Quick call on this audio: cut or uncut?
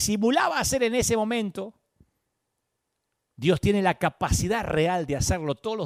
uncut